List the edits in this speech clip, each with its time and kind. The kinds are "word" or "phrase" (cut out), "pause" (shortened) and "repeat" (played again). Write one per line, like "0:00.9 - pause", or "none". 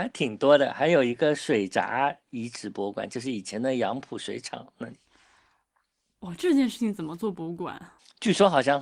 none